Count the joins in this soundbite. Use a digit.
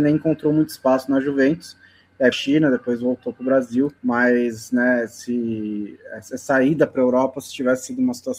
2